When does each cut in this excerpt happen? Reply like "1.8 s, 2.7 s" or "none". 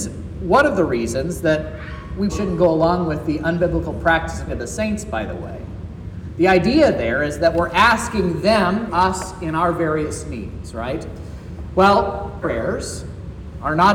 2.3 s, 4.5 s, 8.9 s, 12.4 s